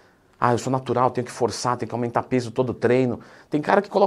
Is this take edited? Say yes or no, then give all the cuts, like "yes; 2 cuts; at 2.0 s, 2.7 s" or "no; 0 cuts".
no; 0 cuts